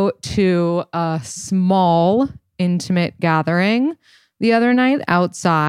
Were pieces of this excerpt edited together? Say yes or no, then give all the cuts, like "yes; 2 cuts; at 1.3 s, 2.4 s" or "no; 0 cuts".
no; 0 cuts